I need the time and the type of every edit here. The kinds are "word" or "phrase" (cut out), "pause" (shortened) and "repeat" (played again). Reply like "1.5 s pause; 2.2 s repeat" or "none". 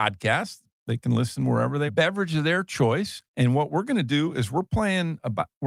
1.9 s phrase; 3.3 s pause